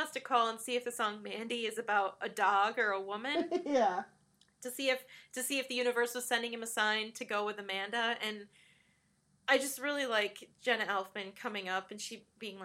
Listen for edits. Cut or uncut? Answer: uncut